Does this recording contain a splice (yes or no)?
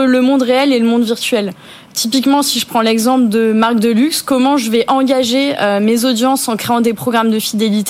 no